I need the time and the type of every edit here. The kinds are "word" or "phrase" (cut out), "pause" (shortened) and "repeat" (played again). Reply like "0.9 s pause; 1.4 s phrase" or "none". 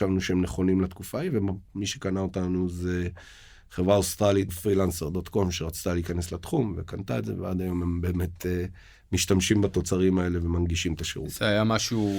4.5 s word